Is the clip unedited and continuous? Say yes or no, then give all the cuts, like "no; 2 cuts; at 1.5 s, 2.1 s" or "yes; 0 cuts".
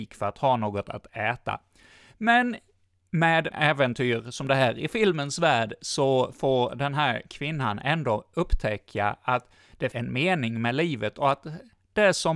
no; 2 cuts; at 3.5 s, 9.9 s